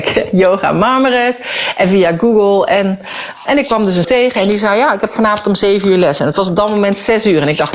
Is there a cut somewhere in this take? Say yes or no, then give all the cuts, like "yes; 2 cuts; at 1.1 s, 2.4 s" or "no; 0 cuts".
yes; 2 cuts; at 3.5 s, 4.0 s